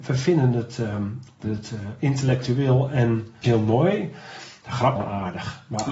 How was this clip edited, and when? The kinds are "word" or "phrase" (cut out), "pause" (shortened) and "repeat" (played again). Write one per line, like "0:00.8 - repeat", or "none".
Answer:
0:01.4 - word
0:03.4 - word
0:05.0 - word